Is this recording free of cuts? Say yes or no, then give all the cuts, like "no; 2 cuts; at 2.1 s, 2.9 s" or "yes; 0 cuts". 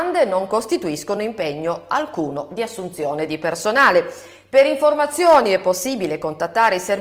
yes; 0 cuts